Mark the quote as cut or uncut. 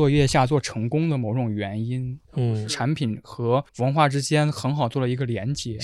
cut